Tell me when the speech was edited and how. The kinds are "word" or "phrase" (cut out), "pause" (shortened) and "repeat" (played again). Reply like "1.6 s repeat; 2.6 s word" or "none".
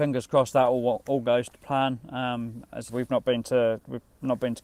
2.9 s phrase